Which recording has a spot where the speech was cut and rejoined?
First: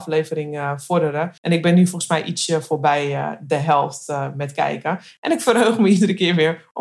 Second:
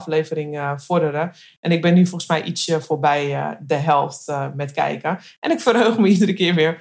first; 1 cut; at 1.4 s

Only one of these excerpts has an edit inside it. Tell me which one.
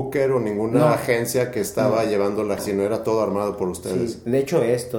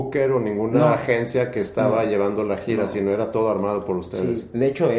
first; 1 cut; at 2.6 s

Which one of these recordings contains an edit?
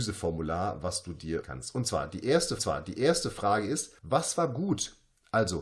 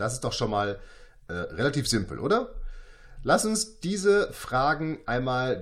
first; 3 cuts; at 1.4 s, 2.6 s, 4.0 s

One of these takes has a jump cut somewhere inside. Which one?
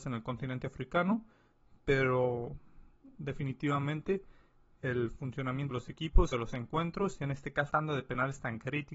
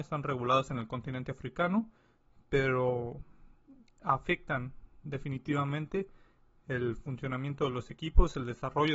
first; 4 cuts; at 3.1 s, 5.7 s, 6.3 s, 7.7 s

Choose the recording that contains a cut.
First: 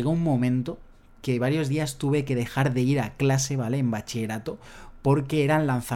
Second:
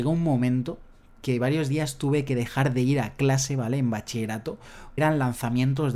second; 1 cut; at 5.0 s

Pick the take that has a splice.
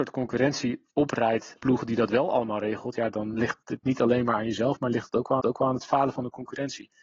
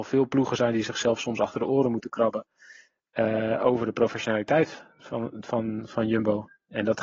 first; 3 cuts; at 1.6 s, 3.3 s, 5.4 s

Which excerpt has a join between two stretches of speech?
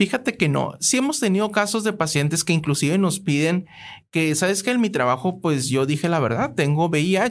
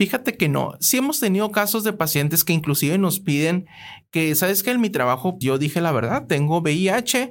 second; 1 cut; at 5.4 s

